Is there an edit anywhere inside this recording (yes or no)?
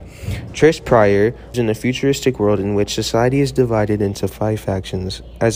yes